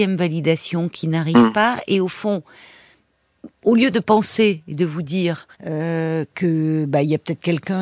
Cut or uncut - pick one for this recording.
cut